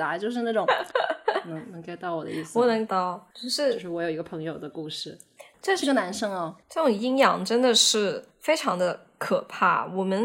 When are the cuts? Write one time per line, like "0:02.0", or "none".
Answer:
0:02.9
0:03.3
0:05.5
0:06.6
0:08.3